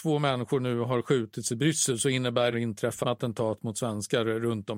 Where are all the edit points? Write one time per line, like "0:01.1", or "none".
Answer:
0:02.5
0:03.0